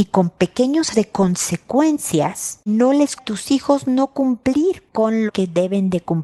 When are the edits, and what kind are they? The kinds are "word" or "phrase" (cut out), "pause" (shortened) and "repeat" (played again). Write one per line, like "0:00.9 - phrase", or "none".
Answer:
0:00.9 - word
0:02.7 - word
0:03.2 - word
0:05.3 - word